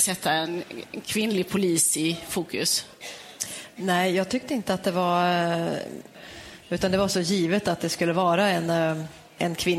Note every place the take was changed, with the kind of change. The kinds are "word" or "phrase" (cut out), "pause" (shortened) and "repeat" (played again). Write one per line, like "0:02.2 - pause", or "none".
none